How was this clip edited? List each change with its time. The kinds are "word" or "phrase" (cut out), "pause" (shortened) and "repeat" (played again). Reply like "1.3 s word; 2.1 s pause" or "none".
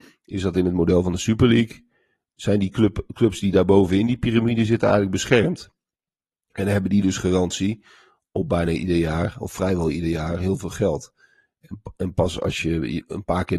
none